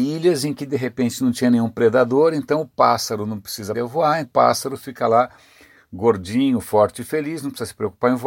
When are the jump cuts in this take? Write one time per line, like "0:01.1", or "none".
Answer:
0:03.7
0:04.2